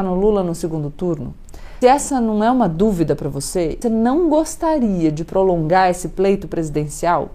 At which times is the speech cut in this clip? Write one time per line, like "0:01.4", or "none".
0:01.8
0:03.8